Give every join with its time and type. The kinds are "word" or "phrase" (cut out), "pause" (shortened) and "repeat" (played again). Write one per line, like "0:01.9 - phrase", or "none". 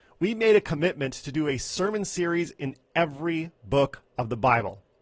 none